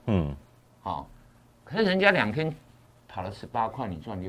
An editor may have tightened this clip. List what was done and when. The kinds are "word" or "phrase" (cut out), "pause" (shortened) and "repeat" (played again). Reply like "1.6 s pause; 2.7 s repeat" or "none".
none

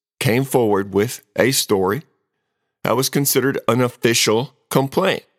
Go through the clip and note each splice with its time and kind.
none

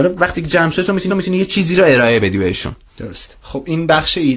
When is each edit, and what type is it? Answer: 1.1 s repeat; 3.4 s pause

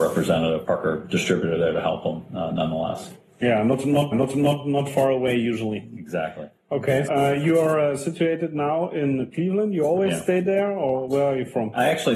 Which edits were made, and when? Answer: 4.1 s repeat; 7.1 s word

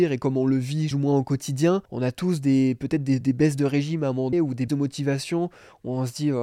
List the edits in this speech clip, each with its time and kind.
0.9 s phrase; 1.9 s pause; 3.2 s word; 4.3 s word; 4.7 s word

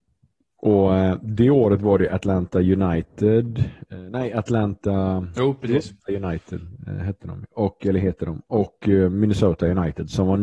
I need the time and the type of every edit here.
6.0 s pause

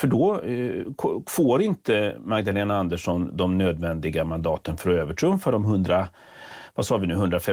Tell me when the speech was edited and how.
none

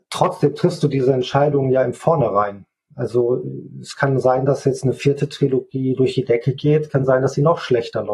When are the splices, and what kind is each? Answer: none

